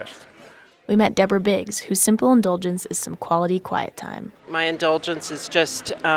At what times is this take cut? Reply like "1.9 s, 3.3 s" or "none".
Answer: 4.4 s